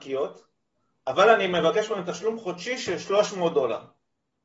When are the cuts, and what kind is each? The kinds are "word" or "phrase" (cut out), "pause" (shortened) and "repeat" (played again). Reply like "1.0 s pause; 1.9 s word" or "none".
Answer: none